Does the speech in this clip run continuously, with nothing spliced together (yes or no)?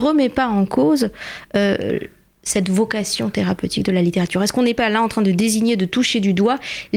yes